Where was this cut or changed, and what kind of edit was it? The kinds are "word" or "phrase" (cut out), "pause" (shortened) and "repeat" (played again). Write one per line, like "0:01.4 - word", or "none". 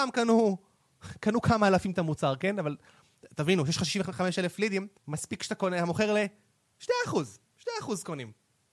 0:05.0 - pause
0:07.4 - pause

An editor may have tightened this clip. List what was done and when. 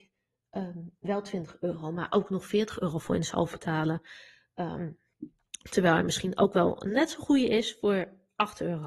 0:03.5 - word

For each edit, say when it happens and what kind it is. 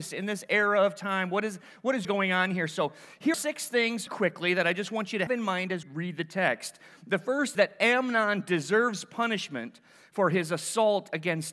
0:02.0 - word
0:03.3 - word
0:04.1 - word
0:05.3 - word
0:05.8 - word
0:07.5 - word

